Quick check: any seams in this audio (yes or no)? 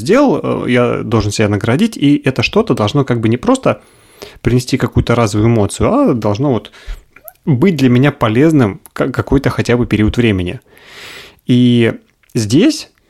no